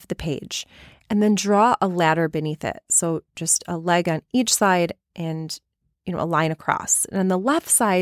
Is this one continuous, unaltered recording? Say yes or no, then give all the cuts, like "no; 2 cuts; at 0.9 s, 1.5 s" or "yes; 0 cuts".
yes; 0 cuts